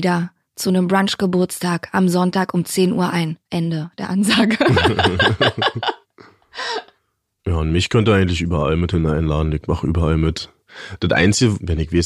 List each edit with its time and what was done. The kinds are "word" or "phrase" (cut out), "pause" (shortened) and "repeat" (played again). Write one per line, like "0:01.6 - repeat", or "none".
0:03.4 - pause
0:06.0 - pause